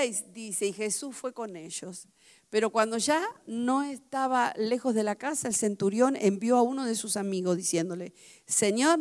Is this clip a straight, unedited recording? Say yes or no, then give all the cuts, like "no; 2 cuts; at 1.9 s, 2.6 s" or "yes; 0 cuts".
yes; 0 cuts